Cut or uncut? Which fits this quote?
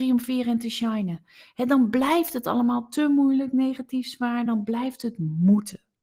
uncut